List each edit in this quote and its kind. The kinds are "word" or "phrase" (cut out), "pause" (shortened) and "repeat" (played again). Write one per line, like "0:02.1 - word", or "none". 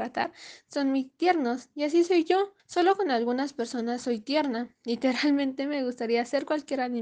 0:02.6 - pause